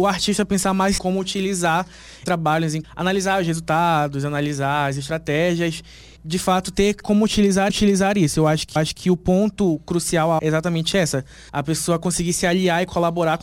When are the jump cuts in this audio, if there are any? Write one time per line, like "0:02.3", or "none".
0:01.0
0:02.3
0:02.8
0:06.2
0:07.0
0:07.7
0:08.8
0:10.4
0:11.5